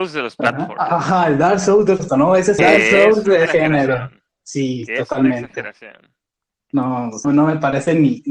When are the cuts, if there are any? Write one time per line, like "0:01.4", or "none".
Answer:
0:02.1
0:02.6
0:03.5
0:07.2